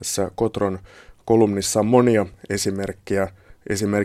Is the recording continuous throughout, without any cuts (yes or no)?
yes